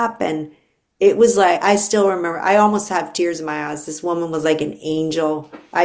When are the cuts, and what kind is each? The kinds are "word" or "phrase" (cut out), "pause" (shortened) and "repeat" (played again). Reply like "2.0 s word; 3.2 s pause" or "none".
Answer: none